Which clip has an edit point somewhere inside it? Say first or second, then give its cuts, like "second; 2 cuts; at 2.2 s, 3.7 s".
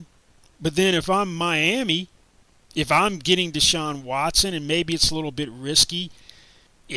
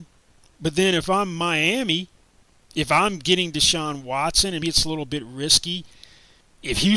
second; 1 cut; at 4.6 s